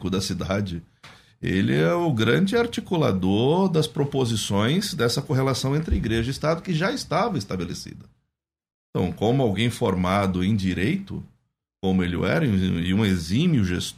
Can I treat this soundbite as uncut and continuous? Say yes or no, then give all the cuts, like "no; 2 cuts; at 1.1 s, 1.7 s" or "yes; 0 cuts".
yes; 0 cuts